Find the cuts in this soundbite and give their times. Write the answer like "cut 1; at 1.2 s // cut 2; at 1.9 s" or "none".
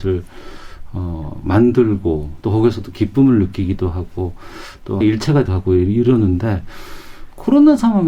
cut 1; at 5.0 s // cut 2; at 5.5 s